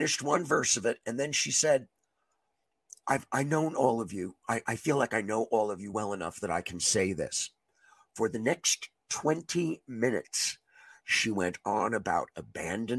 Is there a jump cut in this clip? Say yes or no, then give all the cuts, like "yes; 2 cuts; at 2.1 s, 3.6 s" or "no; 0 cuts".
no; 0 cuts